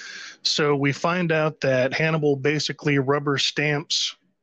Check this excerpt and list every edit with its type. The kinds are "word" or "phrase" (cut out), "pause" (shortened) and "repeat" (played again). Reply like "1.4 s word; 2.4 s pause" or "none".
none